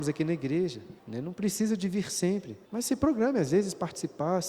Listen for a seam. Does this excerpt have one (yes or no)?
yes